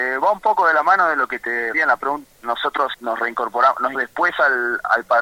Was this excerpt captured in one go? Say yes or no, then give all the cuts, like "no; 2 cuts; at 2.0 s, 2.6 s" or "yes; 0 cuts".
no; 4 cuts; at 1.7 s, 2.2 s, 2.9 s, 3.9 s